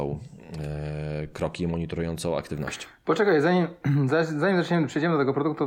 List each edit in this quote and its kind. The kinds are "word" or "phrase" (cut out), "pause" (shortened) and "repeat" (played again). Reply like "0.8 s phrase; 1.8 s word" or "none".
none

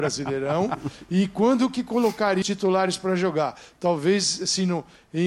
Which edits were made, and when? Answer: 2.4 s word

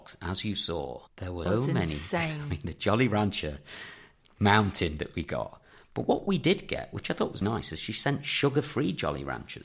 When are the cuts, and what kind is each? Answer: 1.1 s pause; 1.5 s word; 7.4 s word

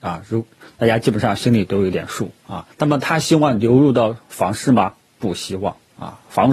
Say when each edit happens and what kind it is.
2.7 s pause

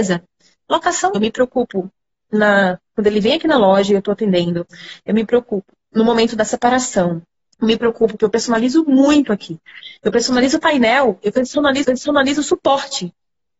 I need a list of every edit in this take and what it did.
1.1 s word; 7.4 s pause; 8.2 s phrase; 11.8 s repeat

